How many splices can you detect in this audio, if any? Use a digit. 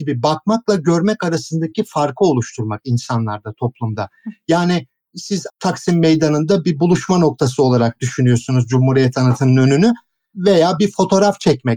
0